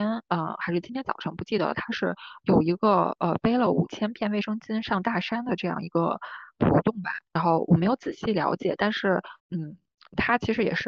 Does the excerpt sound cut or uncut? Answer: cut